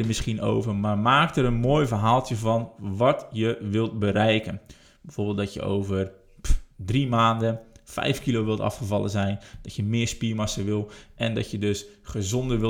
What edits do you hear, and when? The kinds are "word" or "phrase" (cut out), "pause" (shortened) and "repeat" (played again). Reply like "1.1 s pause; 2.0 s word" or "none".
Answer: none